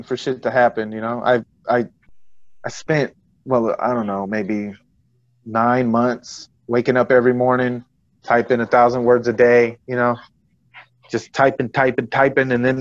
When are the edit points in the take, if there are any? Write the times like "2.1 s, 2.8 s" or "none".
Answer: none